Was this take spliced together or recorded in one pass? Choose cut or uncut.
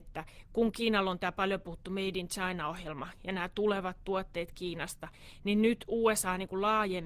uncut